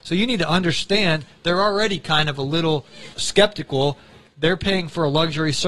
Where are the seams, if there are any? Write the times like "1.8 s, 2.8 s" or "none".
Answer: 3.2 s